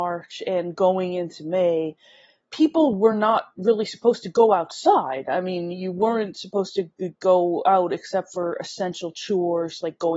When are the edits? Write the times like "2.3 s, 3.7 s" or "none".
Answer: none